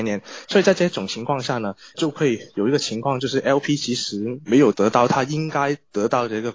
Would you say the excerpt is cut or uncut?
cut